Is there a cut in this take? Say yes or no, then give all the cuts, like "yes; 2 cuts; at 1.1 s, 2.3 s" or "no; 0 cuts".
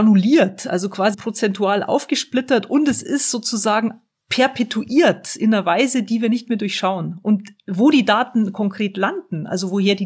yes; 1 cut; at 1.1 s